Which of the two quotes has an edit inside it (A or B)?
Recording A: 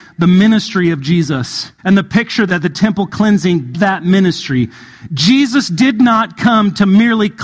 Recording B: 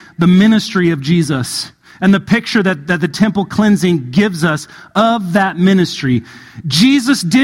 A